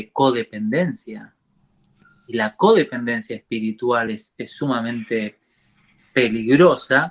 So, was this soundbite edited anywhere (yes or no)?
no